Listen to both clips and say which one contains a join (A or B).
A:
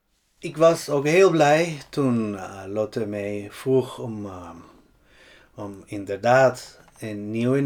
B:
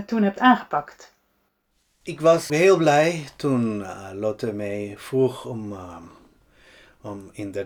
B